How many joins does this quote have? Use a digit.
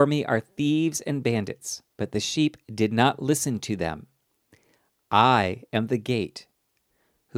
1